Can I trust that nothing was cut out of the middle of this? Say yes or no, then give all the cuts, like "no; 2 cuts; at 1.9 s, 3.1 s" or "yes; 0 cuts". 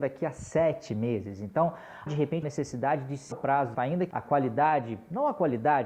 no; 5 cuts; at 2.1 s, 2.4 s, 3.3 s, 3.7 s, 4.1 s